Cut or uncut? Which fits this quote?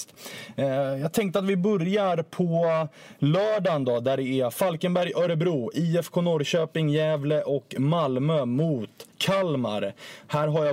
cut